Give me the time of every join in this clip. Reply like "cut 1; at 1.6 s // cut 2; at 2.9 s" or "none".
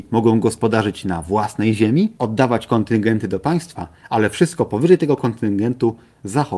none